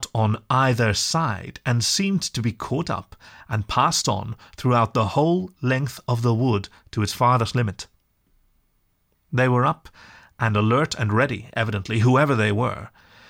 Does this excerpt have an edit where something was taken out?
no; 0 cuts

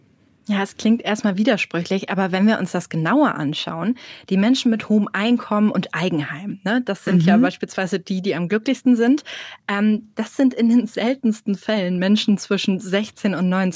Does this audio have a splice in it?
no; 0 cuts

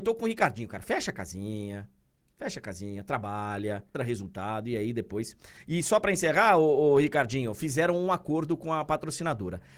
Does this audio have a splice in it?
yes; 1 cut; at 3.9 s

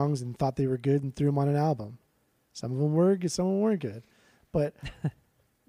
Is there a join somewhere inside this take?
no; 0 cuts

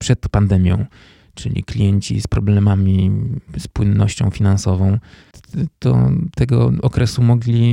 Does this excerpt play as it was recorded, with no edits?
yes; 0 cuts

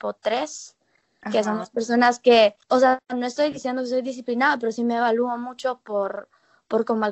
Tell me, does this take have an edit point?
yes; 1 cut; at 2.6 s

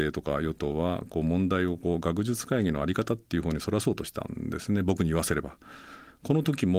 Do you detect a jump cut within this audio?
no; 0 cuts

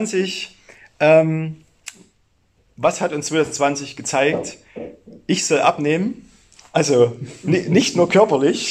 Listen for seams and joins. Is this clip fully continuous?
yes; 0 cuts

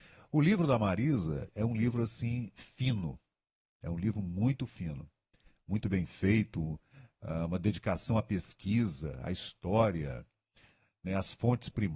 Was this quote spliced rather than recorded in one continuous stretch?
no; 0 cuts

